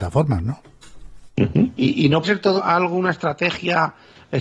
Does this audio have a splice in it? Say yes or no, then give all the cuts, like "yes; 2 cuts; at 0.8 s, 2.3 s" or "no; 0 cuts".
yes; 2 cuts; at 2.2 s, 2.6 s